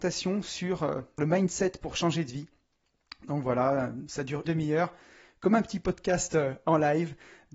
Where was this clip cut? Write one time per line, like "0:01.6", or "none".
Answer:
0:01.2
0:04.4